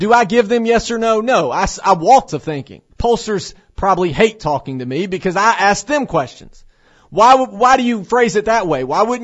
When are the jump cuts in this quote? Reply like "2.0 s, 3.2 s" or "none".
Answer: 2.3 s, 2.9 s